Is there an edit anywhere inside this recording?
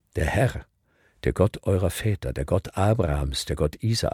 no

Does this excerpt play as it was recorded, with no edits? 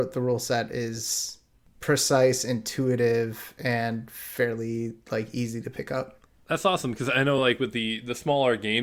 yes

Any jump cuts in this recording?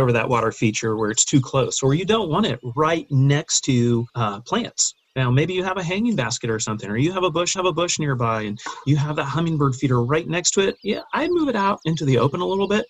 yes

